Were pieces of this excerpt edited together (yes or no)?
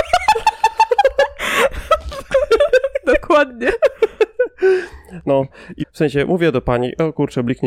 yes